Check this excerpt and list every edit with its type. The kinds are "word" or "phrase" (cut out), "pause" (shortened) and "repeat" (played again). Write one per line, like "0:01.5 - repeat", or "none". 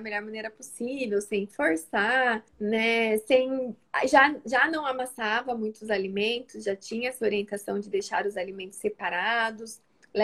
0:02.5 - pause